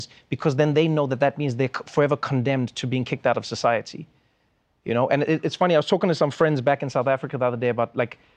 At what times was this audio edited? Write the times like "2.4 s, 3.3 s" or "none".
none